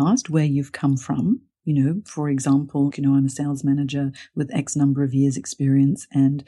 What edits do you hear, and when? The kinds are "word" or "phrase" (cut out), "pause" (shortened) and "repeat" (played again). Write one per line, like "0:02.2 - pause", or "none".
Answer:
none